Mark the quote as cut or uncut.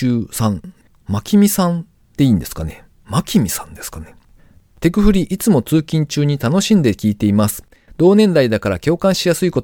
uncut